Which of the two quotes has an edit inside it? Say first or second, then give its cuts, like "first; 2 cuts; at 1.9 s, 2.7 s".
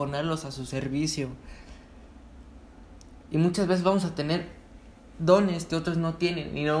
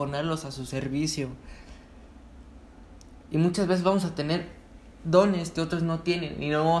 second; 1 cut; at 4.9 s